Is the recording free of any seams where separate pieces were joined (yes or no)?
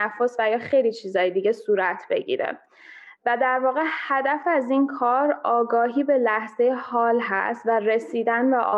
yes